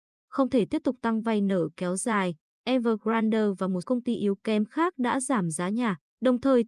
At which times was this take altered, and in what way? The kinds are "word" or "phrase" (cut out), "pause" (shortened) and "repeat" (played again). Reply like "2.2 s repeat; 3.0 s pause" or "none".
3.8 s word